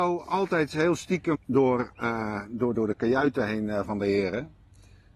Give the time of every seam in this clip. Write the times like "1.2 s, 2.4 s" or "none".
1.3 s, 2.7 s, 3.8 s